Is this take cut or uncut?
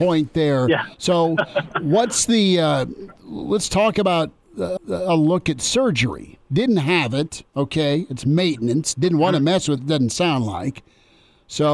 cut